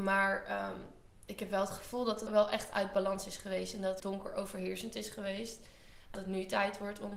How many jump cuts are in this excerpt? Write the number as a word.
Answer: three